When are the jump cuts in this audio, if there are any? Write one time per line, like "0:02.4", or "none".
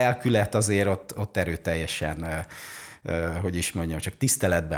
0:01.1